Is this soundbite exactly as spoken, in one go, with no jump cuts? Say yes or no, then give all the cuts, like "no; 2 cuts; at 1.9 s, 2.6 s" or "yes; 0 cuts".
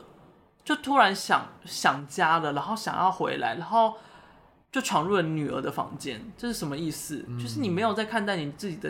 no; 1 cut; at 1.6 s